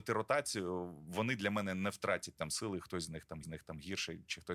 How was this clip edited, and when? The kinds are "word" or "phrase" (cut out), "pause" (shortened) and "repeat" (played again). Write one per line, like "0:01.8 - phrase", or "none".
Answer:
0:03.4 - repeat